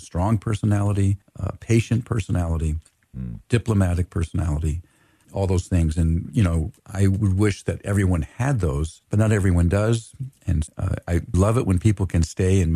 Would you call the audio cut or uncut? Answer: cut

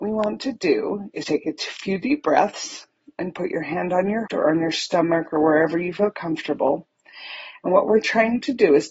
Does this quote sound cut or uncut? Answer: cut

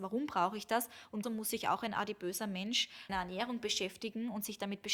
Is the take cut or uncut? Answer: cut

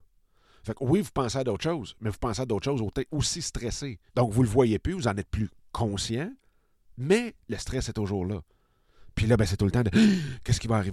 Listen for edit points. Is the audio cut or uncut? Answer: cut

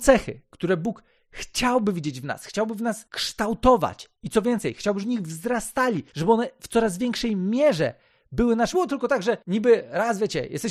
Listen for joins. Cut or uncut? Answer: cut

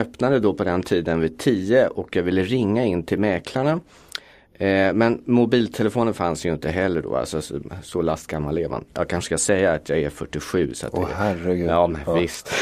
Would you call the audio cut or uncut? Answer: uncut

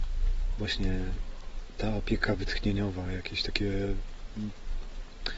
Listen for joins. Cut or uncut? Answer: uncut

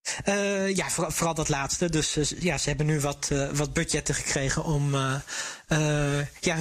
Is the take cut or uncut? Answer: uncut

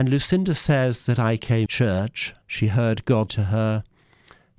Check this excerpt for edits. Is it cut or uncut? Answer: cut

